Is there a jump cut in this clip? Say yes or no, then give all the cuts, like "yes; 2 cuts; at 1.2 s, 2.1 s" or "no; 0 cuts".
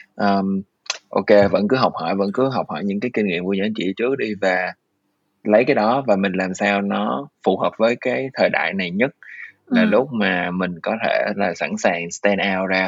no; 0 cuts